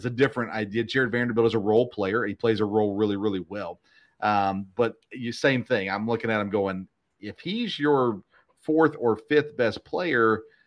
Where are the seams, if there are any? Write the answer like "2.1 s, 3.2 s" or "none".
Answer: none